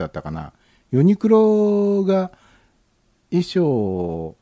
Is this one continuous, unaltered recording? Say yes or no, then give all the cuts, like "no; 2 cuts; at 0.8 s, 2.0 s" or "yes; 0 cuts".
yes; 0 cuts